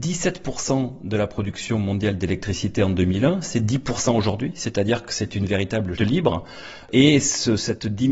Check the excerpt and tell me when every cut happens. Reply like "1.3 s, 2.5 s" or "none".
6.0 s